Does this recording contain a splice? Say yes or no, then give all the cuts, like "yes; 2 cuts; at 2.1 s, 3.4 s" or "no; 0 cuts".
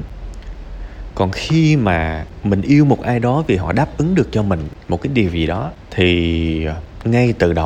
no; 0 cuts